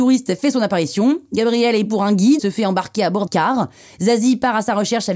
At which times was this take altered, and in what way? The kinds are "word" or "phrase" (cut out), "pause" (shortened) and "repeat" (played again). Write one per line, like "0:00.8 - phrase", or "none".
0:01.9 - word
0:02.4 - word
0:03.3 - word

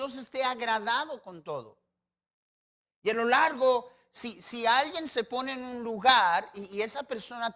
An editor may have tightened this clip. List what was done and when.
none

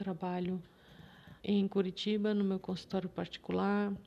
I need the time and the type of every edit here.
0:01.4 - pause

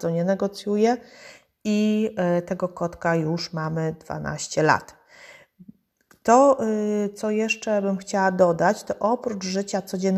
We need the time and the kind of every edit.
none

